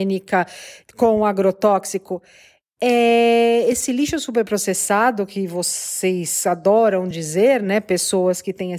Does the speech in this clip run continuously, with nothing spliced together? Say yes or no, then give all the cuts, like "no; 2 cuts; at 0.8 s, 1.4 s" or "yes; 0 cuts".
yes; 0 cuts